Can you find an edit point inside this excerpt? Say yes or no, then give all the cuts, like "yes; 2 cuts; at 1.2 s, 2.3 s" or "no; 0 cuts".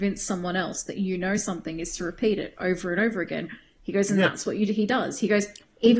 no; 0 cuts